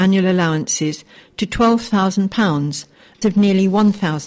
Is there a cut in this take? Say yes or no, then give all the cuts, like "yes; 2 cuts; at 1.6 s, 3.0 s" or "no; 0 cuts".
yes; 1 cut; at 3.2 s